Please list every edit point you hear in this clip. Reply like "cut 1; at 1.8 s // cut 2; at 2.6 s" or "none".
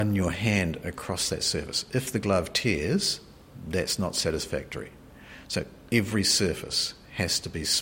none